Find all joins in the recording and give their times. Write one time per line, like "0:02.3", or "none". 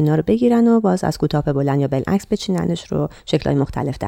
none